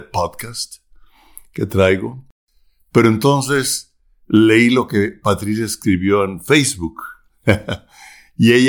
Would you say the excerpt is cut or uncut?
uncut